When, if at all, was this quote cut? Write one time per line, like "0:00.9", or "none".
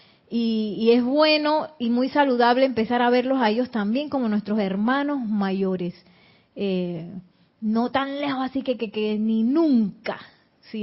none